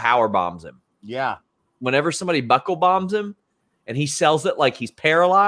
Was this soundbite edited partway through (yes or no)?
no